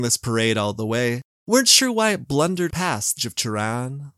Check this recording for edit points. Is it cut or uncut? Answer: cut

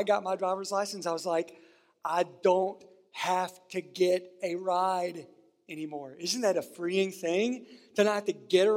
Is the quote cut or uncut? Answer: uncut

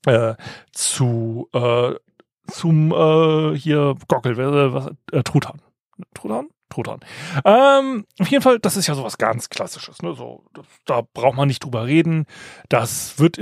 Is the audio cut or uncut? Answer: uncut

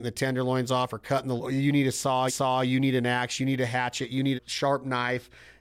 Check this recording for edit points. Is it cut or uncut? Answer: cut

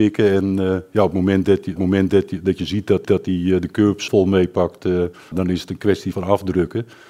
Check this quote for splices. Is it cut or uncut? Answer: cut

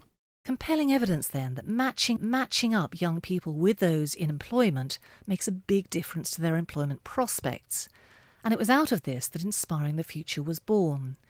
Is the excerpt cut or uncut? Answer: cut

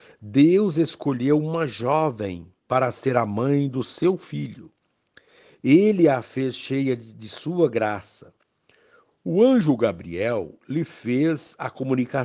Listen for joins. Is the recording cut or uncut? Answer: uncut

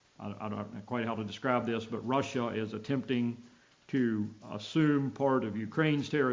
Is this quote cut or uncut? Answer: uncut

